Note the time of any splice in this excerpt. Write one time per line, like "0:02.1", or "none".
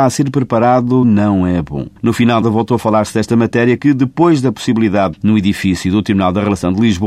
0:01.0
0:02.0
0:02.4
0:03.8
0:05.1